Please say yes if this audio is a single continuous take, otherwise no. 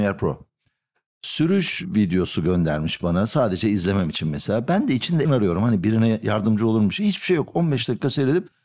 no